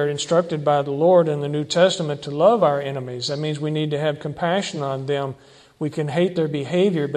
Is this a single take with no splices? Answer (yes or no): yes